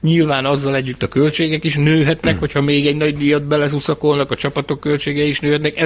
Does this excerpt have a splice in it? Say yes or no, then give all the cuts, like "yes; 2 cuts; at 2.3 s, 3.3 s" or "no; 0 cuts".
no; 0 cuts